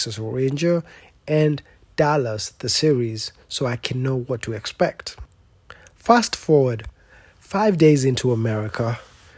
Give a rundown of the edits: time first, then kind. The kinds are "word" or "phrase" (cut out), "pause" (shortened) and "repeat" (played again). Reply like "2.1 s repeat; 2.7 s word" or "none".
none